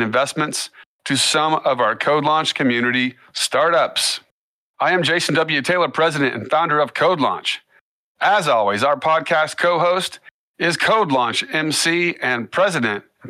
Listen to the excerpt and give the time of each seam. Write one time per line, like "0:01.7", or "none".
none